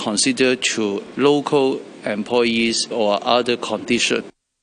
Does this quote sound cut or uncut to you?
cut